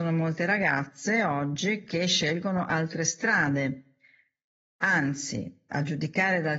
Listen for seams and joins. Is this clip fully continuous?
yes; 0 cuts

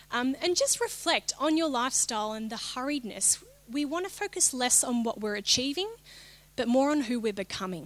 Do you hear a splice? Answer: no; 0 cuts

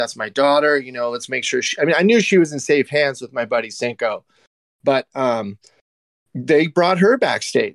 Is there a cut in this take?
no; 0 cuts

